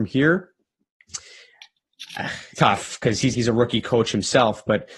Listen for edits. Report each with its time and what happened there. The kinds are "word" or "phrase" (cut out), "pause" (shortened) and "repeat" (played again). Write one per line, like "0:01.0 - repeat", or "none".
0:02.5 - word
0:03.3 - word